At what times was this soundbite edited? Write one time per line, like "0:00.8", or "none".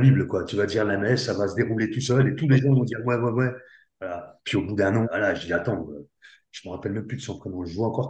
0:04.4
0:05.0